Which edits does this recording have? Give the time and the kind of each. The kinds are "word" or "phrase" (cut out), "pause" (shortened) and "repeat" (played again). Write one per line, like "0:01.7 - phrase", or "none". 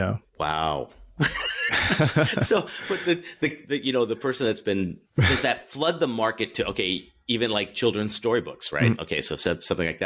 0:01.7 - word
0:05.1 - pause